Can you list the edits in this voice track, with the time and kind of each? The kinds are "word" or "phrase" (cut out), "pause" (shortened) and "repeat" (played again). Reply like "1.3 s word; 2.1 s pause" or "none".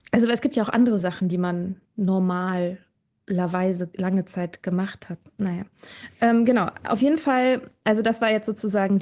none